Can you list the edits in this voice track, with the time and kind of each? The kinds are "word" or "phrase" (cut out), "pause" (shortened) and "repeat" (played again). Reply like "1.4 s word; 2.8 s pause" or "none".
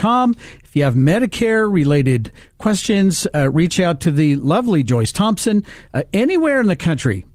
none